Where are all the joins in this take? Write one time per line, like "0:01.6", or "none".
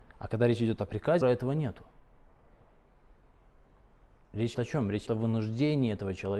0:01.2
0:04.5
0:05.1

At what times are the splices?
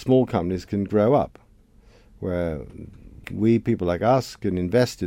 0:03.2

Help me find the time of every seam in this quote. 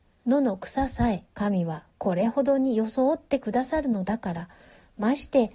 0:01.3

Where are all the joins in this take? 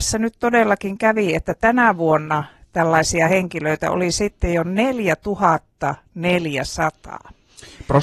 none

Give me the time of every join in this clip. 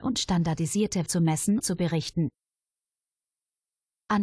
0:01.1
0:01.6

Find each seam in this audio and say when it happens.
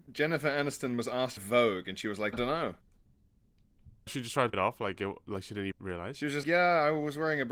0:01.4
0:02.3
0:04.1
0:04.5
0:05.7
0:06.4

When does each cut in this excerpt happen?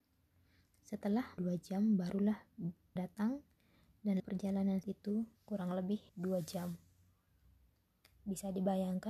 0:01.4
0:03.0
0:04.2
0:04.8
0:05.4
0:06.1

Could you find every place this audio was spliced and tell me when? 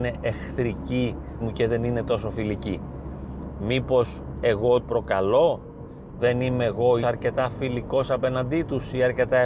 0:01.4
0:04.8
0:06.2
0:07.0

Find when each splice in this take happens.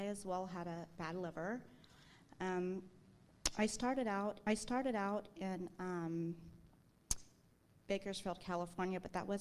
0:01.0
0:04.5

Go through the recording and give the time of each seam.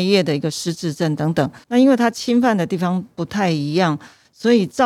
0:01.6

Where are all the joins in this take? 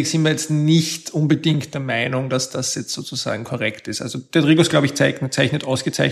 none

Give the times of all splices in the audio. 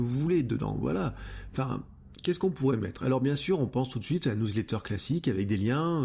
none

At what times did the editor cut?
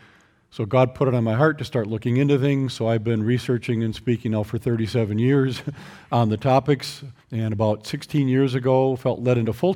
0:07.2

